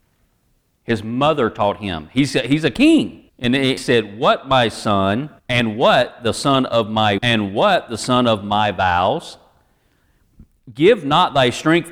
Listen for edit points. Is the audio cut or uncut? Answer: cut